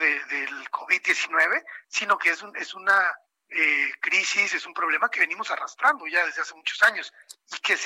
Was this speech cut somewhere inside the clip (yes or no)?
no